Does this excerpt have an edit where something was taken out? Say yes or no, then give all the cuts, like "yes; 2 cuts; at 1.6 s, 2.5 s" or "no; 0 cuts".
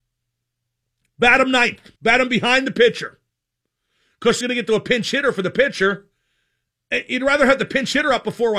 yes; 2 cuts; at 2.0 s, 4.4 s